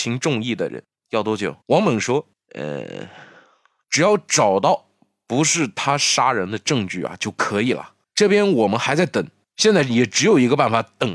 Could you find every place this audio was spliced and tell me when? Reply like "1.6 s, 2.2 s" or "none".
1.6 s